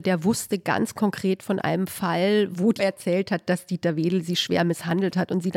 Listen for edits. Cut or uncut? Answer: cut